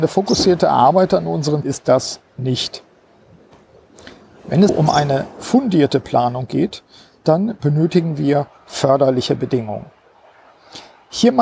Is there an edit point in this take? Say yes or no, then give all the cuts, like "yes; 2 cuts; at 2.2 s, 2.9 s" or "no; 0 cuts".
yes; 2 cuts; at 1.6 s, 4.7 s